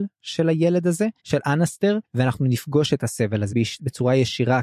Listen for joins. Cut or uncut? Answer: cut